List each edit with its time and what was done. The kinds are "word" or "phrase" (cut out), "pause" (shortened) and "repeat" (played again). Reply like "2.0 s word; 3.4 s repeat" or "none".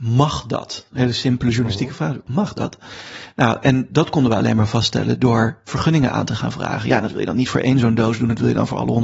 none